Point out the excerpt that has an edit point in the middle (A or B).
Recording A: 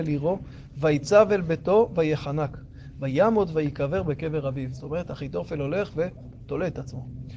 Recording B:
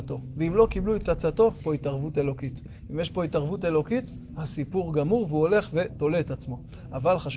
B